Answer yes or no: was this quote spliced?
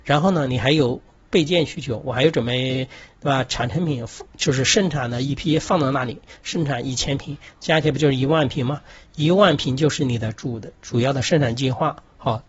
yes